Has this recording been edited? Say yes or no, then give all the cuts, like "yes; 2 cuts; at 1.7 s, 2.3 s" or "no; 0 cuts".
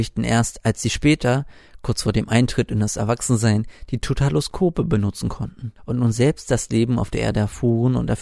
yes; 1 cut; at 5.8 s